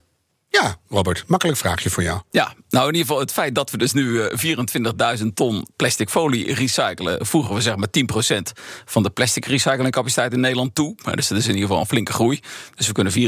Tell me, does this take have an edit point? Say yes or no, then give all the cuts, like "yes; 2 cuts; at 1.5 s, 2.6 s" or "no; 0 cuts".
no; 0 cuts